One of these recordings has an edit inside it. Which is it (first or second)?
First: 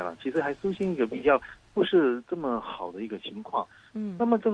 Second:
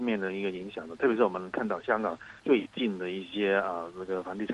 second